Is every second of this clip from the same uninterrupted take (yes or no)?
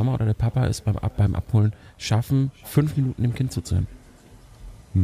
yes